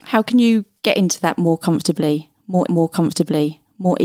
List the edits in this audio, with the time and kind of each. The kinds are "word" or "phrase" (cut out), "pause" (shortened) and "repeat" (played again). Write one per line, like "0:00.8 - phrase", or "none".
0:02.7 - repeat